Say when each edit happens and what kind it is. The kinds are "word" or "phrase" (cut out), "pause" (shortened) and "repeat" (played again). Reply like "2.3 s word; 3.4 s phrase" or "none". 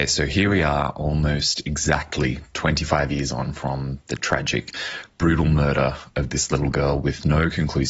none